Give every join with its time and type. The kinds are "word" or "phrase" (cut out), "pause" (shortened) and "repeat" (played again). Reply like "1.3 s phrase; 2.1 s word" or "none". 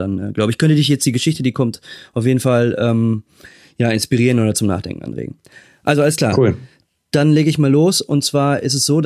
none